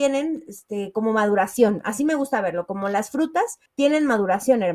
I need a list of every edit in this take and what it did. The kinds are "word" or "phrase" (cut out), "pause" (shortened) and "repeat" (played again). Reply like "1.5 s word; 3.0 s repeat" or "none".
3.7 s pause